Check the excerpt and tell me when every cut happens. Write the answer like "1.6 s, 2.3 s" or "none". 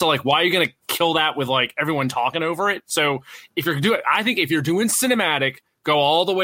none